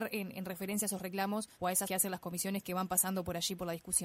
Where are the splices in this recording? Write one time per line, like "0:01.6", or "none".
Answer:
0:01.5
0:01.8